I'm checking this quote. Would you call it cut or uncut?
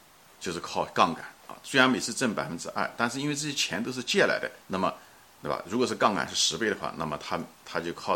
cut